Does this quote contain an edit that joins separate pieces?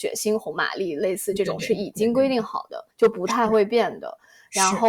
yes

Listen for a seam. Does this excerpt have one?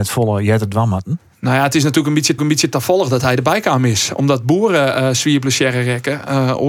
yes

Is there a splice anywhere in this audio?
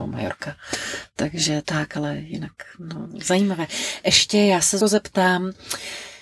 yes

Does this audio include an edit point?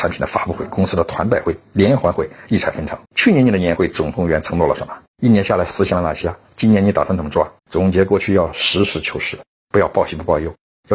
yes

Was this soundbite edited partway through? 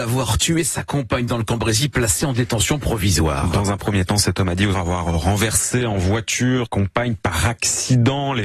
yes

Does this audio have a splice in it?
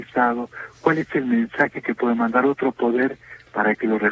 no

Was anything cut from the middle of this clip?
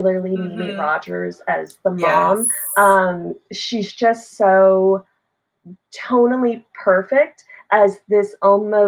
no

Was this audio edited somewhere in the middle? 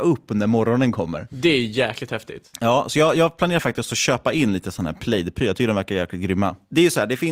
no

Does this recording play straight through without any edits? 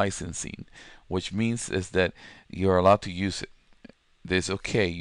yes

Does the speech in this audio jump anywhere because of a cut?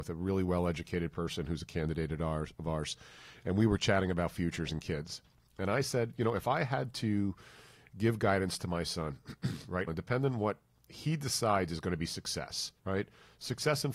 yes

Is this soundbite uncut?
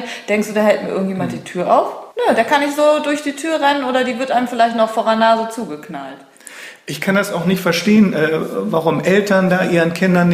no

